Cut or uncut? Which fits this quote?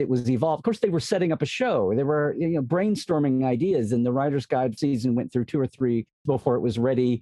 cut